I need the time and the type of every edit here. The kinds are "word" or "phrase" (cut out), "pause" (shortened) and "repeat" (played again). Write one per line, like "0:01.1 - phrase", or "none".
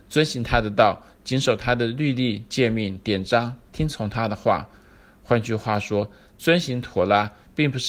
none